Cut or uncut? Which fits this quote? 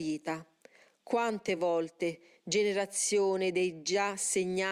uncut